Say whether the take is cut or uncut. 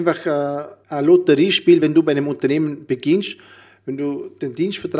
uncut